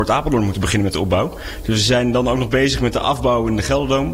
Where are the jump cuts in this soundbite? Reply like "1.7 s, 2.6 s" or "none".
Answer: none